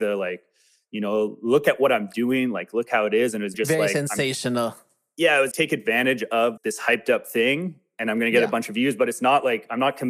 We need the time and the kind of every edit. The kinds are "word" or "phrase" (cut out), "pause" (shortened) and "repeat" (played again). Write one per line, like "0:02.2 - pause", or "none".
0:03.5 - word
0:05.5 - word
0:06.6 - word